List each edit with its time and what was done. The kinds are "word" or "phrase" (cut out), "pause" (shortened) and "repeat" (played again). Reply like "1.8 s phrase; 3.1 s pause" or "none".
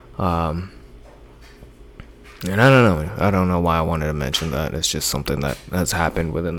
none